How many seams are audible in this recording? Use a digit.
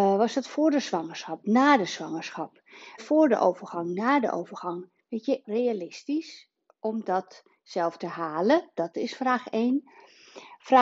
3